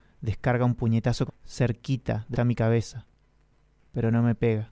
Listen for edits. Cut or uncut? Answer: cut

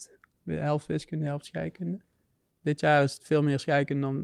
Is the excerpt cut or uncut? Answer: uncut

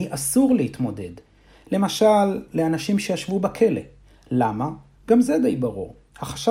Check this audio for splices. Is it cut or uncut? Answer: cut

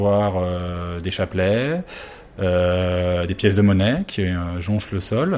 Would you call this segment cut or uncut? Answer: uncut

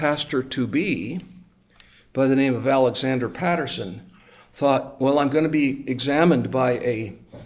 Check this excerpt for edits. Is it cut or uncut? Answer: uncut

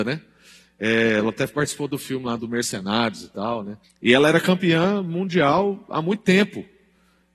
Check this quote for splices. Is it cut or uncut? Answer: cut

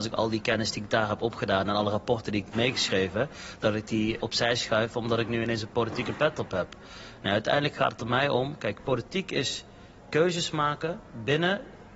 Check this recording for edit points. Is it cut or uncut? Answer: cut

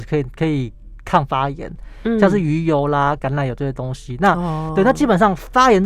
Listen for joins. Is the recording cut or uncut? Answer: uncut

